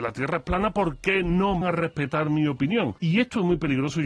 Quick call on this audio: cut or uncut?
cut